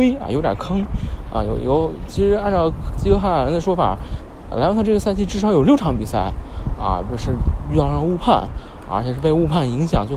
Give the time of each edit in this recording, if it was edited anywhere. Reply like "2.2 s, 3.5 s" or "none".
4.5 s